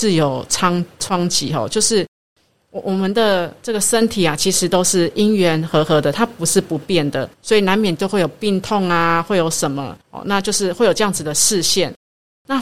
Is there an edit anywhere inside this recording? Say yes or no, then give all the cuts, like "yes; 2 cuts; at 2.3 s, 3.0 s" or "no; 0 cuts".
yes; 2 cuts; at 7.3 s, 10.0 s